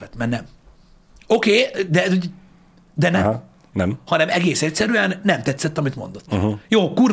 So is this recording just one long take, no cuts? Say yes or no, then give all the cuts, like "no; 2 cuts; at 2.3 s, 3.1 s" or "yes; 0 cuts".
yes; 0 cuts